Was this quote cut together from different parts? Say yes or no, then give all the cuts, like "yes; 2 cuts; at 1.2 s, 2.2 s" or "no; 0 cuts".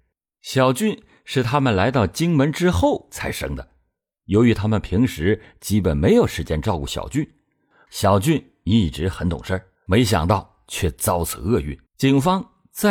yes; 2 cuts; at 9.8 s, 11.9 s